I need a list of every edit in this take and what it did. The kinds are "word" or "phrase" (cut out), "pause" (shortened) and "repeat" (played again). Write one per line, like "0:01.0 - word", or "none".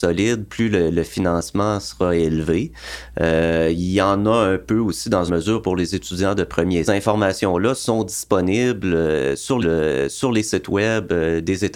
0:05.3 - phrase
0:06.8 - phrase
0:09.6 - repeat